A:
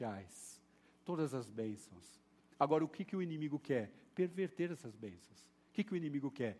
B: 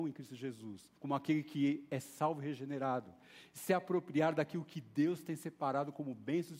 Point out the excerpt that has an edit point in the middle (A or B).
B